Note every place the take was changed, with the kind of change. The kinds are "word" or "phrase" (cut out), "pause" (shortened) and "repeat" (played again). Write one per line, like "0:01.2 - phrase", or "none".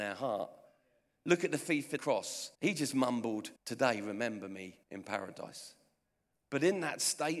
0:02.0 - word
0:02.5 - pause
0:03.6 - pause
0:04.8 - pause

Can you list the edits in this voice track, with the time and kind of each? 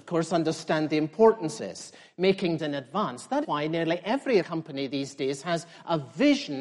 0:01.6 - word
0:02.6 - word
0:03.4 - word
0:04.4 - word

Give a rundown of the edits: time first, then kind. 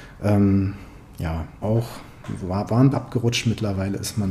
0:01.6 - word
0:02.9 - word

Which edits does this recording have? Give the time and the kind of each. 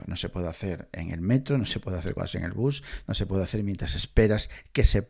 0:02.2 - word

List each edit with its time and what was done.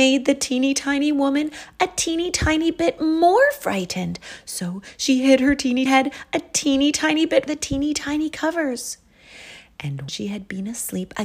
0:05.9 - word
0:07.5 - phrase
0:10.1 - word

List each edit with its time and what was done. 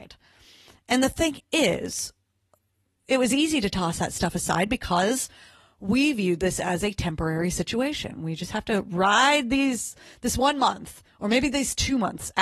none

